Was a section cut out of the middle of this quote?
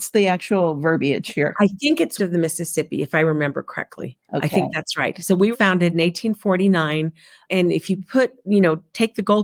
yes; 4 cuts; at 2.2 s, 4.2 s, 5.5 s, 7.5 s

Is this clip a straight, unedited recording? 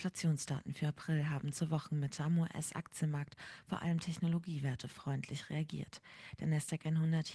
yes; 0 cuts

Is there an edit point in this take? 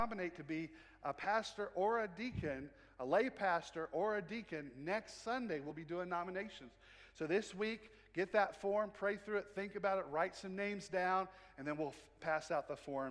no; 0 cuts

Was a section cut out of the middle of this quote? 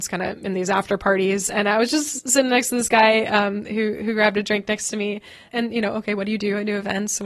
yes; 1 cut; at 5.5 s

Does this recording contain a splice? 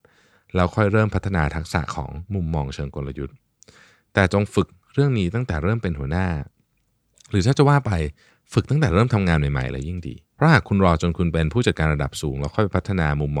yes; 1 cut; at 10.3 s

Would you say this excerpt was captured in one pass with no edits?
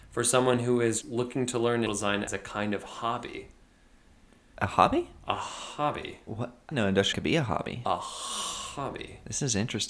no; 5 cuts; at 1.0 s, 1.9 s, 2.3 s, 6.7 s, 7.1 s

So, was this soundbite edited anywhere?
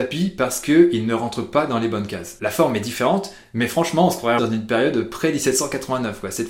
yes; 1 cut; at 4.4 s

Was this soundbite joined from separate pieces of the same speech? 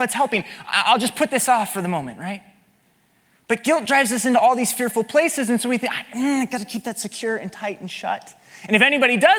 no; 0 cuts

